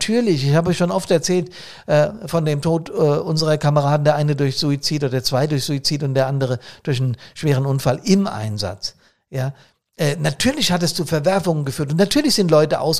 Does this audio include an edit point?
no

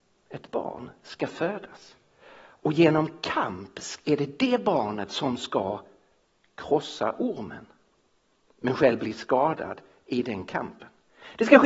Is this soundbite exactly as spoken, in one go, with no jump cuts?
yes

